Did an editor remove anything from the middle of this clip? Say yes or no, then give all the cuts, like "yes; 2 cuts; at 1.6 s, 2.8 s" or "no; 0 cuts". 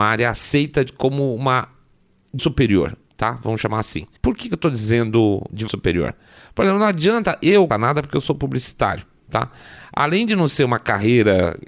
yes; 4 cuts; at 2.4 s, 4.2 s, 5.7 s, 7.7 s